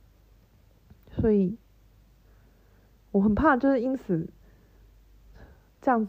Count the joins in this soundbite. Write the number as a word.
zero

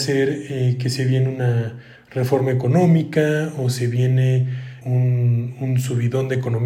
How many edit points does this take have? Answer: one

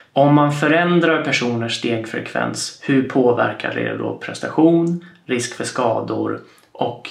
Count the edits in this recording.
zero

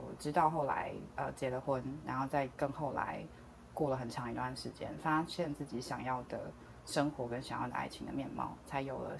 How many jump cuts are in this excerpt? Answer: zero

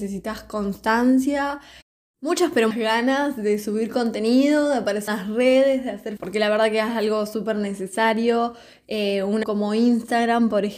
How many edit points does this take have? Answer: four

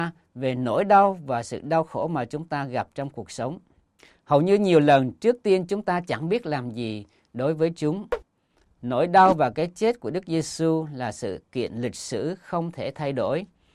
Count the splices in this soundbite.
zero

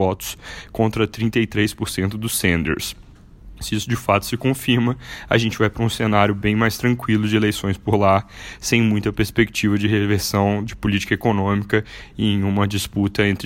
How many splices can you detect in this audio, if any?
zero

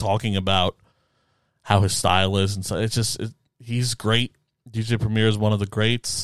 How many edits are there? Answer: zero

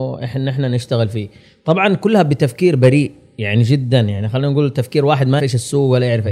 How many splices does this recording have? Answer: one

